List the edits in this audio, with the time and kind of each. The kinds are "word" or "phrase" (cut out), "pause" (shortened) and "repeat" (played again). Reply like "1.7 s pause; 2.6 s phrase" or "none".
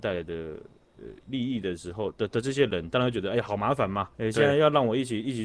4.1 s pause